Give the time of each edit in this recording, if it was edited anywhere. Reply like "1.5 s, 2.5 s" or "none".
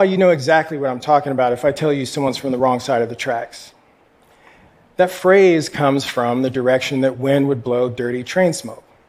none